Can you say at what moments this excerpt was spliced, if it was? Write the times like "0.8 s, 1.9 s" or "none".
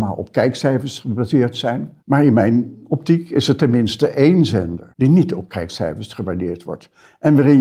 2.0 s, 4.9 s